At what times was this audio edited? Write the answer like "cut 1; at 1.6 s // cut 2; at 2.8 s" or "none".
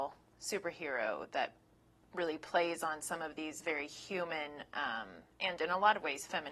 none